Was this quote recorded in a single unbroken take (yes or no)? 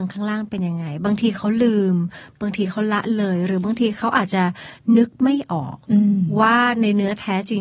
no